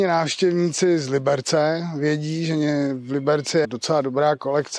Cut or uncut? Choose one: cut